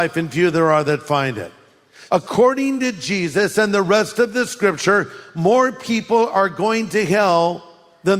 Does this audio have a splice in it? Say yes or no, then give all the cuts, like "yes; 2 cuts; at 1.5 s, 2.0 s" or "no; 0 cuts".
no; 0 cuts